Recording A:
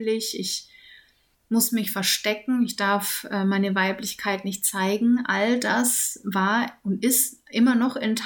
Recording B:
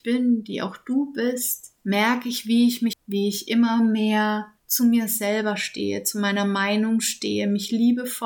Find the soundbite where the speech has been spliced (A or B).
B